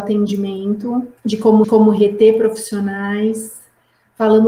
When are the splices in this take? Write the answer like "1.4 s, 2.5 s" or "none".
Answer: 1.2 s, 1.6 s